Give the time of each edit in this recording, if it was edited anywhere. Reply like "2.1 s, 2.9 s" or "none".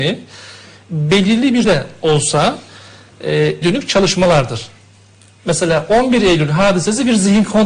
1.6 s, 3.6 s